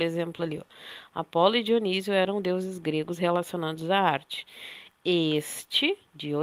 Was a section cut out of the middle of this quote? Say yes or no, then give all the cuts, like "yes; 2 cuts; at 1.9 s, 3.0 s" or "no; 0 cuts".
no; 0 cuts